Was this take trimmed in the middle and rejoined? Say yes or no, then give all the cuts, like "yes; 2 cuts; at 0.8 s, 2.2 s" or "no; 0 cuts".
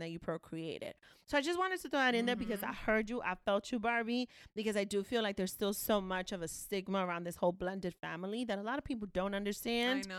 no; 0 cuts